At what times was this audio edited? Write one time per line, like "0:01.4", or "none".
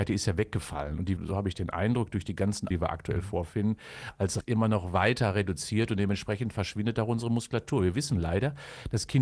0:01.2
0:02.7
0:04.4